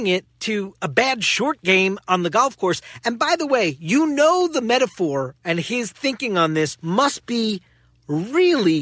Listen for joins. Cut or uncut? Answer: uncut